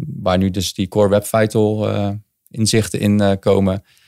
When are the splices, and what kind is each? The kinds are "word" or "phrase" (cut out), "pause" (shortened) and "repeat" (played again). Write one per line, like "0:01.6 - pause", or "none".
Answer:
none